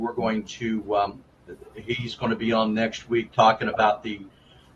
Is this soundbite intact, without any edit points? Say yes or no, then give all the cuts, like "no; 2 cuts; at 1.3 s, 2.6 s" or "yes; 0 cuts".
yes; 0 cuts